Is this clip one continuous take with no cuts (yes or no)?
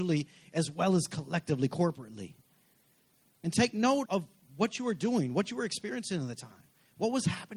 no